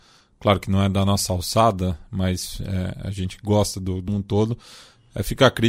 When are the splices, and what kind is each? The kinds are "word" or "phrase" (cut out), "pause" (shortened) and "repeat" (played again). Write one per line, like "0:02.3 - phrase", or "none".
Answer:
0:04.1 - phrase

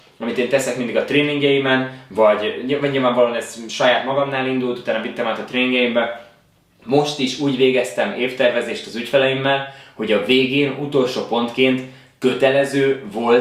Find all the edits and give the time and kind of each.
none

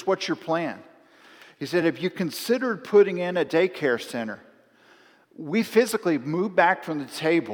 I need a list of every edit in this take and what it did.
none

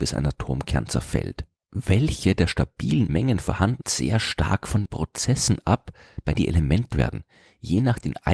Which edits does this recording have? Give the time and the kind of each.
0:03.1 - phrase
0:03.8 - phrase
0:04.9 - word
0:06.3 - word
0:06.9 - word

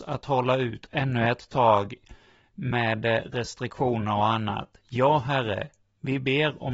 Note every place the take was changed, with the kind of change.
none

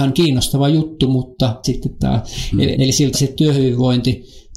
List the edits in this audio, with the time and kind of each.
0:01.6 - word
0:02.7 - word
0:03.1 - word

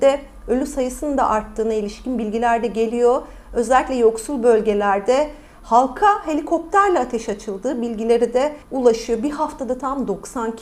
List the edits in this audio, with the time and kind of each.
0:08.6 - pause

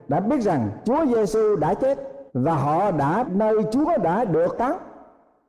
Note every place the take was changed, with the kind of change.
0:02.3 - pause
0:03.2 - word
0:04.6 - word

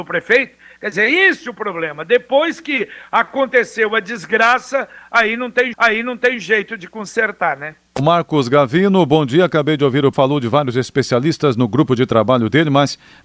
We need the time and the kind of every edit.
0:05.7 - repeat
0:07.9 - pause
0:10.1 - word

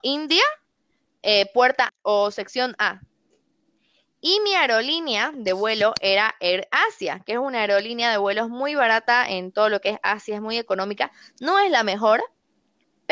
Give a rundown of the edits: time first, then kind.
0:01.9 - word

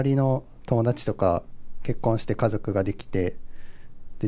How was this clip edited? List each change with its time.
none

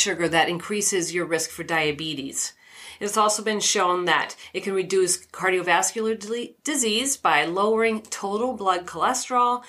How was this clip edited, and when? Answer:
none

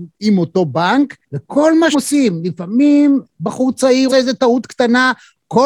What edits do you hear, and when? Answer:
0:01.2 - pause
0:01.9 - word
0:04.1 - word

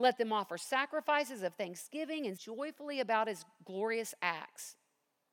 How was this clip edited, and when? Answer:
0:02.4 - word

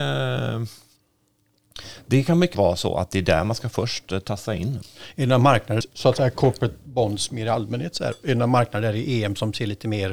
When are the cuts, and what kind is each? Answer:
0:02.5 - word
0:05.8 - phrase

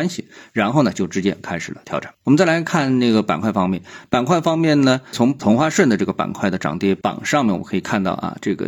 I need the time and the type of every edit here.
0:02.1 - pause

